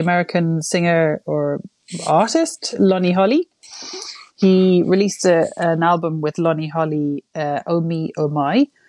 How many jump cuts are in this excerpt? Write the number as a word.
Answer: zero